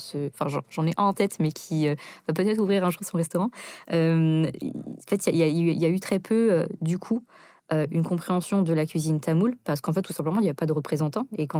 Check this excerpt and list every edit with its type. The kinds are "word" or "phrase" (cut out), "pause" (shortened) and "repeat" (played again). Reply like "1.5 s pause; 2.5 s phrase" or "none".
none